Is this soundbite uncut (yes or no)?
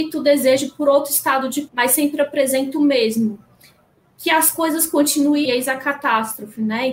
no